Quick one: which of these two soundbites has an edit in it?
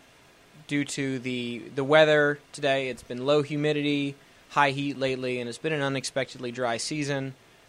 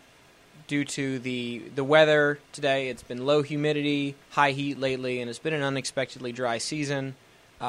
second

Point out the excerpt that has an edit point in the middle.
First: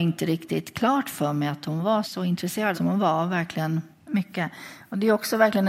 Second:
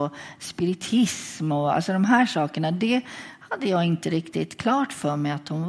first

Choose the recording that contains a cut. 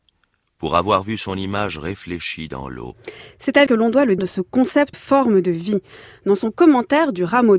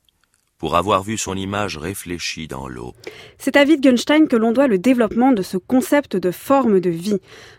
first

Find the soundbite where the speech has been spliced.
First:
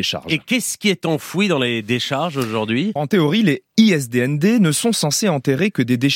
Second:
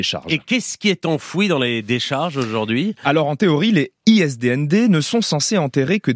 first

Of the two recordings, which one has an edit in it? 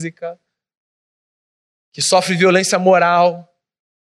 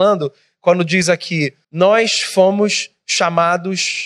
second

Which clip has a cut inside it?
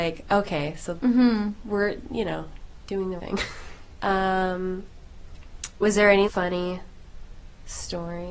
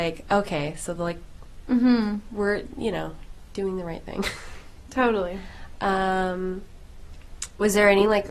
first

